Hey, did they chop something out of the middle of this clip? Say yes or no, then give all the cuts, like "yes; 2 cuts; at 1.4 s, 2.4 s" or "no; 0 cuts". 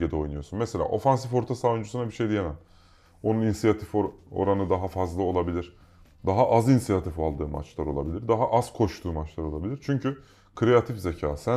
no; 0 cuts